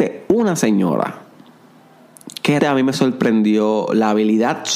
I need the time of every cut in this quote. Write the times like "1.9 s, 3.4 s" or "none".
2.6 s